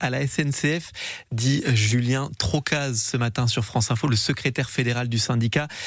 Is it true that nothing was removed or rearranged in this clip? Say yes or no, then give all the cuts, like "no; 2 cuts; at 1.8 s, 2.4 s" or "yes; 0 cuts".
yes; 0 cuts